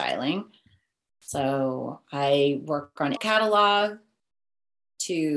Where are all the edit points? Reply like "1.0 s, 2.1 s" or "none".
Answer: 3.2 s